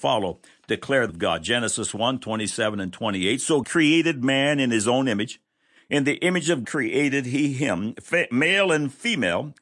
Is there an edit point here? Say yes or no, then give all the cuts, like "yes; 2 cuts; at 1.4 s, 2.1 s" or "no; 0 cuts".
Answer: yes; 3 cuts; at 1.1 s, 3.6 s, 6.6 s